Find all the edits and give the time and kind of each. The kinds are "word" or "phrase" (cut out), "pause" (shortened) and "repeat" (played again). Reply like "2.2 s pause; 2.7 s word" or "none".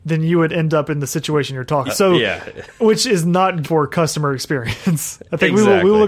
1.9 s word; 3.6 s word